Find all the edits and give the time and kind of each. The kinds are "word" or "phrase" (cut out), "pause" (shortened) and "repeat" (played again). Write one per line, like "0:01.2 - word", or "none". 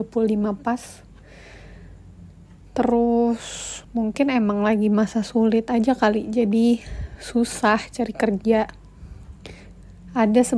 0:03.8 - pause